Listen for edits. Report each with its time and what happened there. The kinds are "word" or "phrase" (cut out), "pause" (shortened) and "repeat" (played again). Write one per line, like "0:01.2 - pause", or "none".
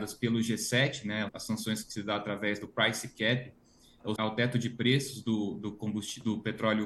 0:01.3 - word
0:04.2 - word